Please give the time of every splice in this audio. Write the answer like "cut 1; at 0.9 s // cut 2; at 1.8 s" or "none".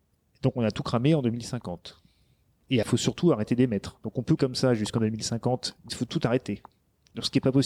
cut 1; at 2.8 s // cut 2; at 4.4 s // cut 3; at 5.9 s